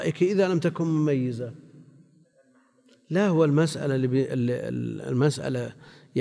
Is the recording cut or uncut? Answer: uncut